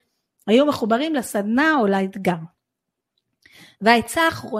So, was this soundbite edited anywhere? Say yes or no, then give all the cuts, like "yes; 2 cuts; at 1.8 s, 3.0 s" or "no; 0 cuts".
no; 0 cuts